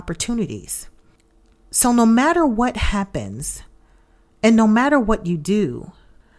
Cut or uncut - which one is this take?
uncut